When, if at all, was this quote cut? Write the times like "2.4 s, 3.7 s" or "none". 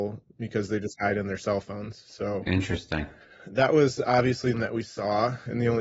4.5 s